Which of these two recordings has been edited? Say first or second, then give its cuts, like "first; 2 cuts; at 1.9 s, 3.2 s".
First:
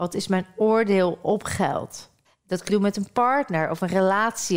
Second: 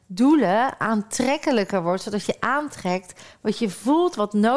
first; 2 cuts; at 2.2 s, 2.7 s